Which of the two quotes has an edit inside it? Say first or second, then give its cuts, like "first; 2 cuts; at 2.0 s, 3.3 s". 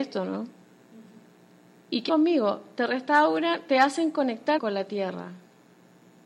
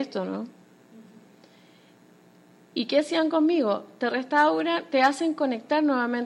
first; 3 cuts; at 1.2 s, 2.1 s, 4.6 s